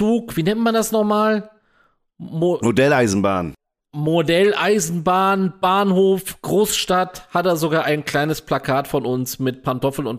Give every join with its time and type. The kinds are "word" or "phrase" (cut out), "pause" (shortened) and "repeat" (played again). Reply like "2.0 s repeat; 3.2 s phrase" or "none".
none

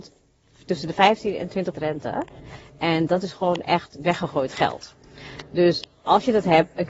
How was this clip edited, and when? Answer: 1.7 s word

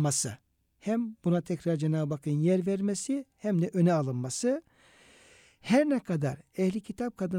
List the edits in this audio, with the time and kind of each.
none

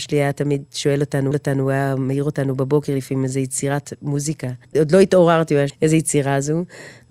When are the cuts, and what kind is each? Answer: 1.3 s repeat; 4.6 s pause; 5.7 s phrase

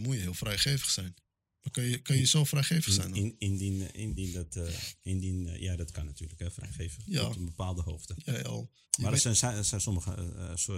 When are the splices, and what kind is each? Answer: 4.2 s word; 7.0 s word; 8.3 s phrase; 8.8 s pause

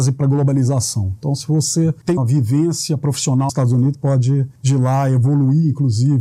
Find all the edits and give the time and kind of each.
2.2 s word; 3.5 s word; 3.9 s word

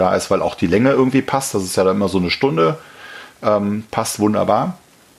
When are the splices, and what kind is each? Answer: none

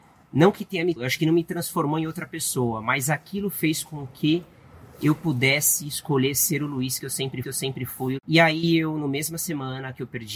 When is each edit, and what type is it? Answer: 1.0 s word; 7.4 s repeat

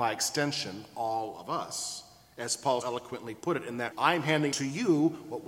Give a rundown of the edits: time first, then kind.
2.8 s word; 3.9 s word; 4.5 s word

